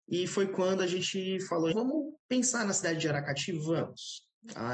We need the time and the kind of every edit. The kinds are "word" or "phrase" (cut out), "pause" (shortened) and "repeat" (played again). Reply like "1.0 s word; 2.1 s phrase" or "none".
1.7 s word